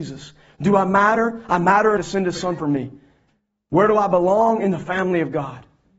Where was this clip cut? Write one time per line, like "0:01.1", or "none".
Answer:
0:02.0
0:02.6